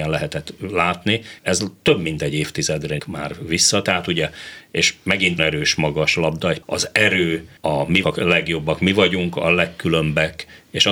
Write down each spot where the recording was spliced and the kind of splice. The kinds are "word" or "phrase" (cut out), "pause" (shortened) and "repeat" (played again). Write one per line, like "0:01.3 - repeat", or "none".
0:01.4 - pause
0:03.0 - word
0:05.4 - phrase
0:06.6 - word
0:07.6 - pause
0:08.0 - word

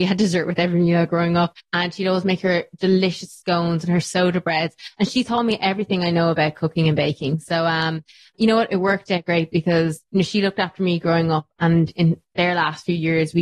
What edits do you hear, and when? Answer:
0:01.6 - pause
0:10.1 - pause

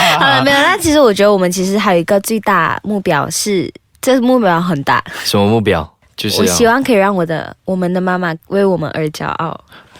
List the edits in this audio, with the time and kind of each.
0:08.4 - pause

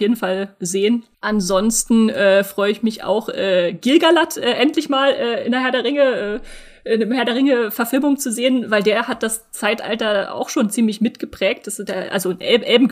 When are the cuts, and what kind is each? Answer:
0:01.1 - pause

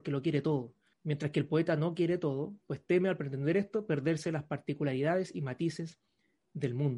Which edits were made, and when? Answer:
0:00.9 - pause

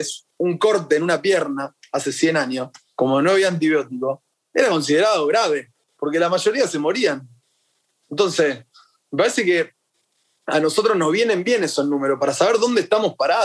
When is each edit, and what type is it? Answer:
none

